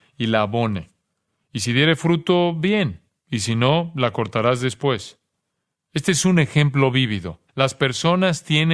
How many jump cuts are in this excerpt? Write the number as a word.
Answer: one